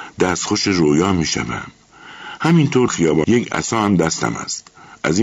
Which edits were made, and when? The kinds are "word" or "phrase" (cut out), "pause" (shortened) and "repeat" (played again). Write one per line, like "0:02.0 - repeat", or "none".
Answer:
0:02.9 - word
0:03.2 - phrase

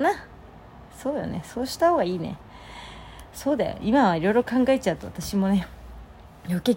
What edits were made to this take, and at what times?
none

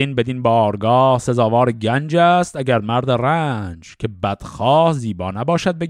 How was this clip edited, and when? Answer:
none

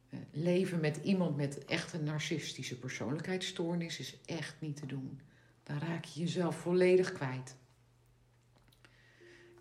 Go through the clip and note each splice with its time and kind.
none

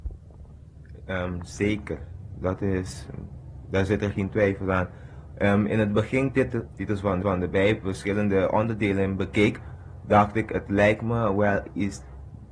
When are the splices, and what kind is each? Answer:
0:06.3 - phrase
0:06.7 - phrase
0:07.2 - repeat

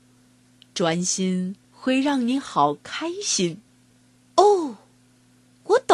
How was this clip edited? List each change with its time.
0:01.6 - pause
0:03.7 - pause

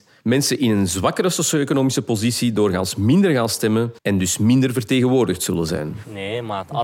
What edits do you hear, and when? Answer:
0:04.0 - pause

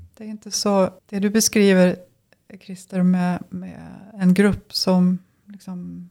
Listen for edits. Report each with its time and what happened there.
0:01.0 - pause

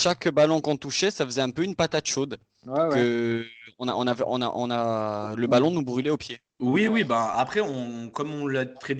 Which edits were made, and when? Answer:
none

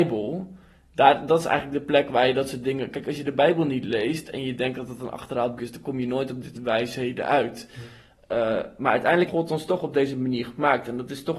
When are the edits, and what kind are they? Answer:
0:05.6 - word
0:06.5 - word
0:09.3 - word

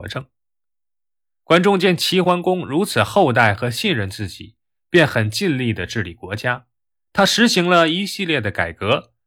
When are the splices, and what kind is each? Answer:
none

